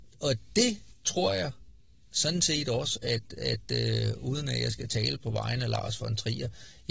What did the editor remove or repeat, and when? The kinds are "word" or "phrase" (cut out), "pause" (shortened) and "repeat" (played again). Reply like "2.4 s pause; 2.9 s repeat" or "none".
none